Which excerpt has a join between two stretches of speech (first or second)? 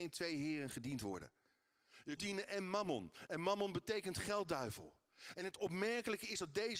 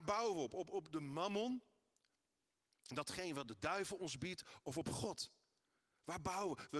first